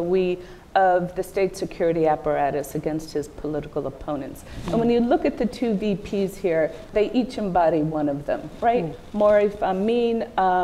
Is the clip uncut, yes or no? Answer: no